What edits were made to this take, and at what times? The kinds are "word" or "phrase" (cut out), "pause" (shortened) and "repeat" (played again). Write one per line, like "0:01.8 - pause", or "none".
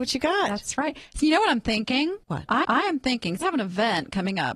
0:02.2 - pause
0:02.6 - repeat
0:03.4 - word